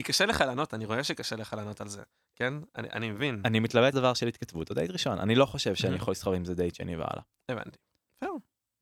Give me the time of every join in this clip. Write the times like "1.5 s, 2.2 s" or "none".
3.9 s